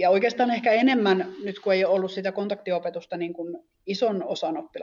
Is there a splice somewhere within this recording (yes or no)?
no